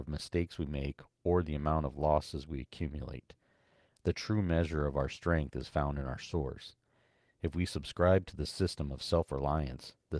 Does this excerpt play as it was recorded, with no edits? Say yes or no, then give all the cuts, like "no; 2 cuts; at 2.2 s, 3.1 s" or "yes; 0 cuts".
yes; 0 cuts